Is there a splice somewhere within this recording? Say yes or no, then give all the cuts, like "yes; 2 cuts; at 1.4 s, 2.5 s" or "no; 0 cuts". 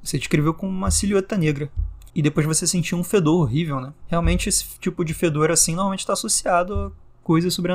yes; 1 cut; at 2.1 s